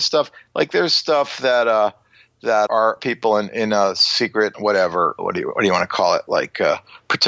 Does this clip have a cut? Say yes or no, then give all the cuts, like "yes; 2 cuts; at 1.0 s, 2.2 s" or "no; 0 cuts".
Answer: yes; 4 cuts; at 2.7 s, 3.0 s, 4.5 s, 5.2 s